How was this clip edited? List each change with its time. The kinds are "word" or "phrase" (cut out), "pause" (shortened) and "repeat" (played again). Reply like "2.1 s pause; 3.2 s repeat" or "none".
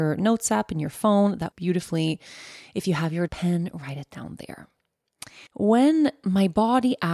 1.5 s word; 3.3 s phrase; 5.5 s pause